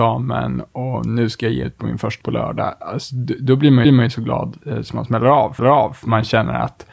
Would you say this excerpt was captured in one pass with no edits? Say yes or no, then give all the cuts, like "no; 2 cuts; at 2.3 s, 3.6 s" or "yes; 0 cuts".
no; 5 cuts; at 1.6 s, 2.2 s, 3.8 s, 4.6 s, 5.6 s